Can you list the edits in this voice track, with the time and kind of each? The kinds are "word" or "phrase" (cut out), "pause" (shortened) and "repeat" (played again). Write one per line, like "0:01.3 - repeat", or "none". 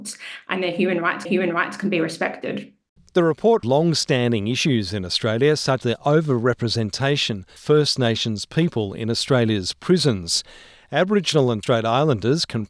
0:01.2 - repeat
0:03.6 - word
0:05.8 - word
0:07.6 - word
0:11.6 - word